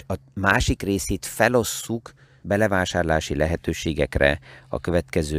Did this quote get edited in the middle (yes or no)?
yes